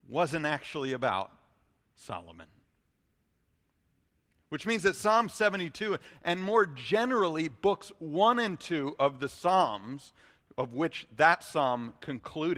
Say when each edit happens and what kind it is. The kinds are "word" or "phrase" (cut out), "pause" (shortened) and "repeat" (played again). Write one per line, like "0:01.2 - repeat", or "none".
none